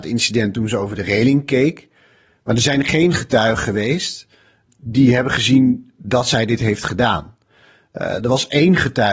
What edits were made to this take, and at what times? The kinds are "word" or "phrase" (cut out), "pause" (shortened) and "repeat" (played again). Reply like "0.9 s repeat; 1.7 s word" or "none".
none